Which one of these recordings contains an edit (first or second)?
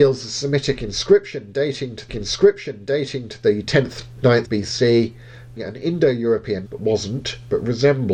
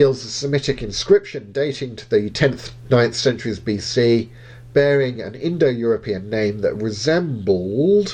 first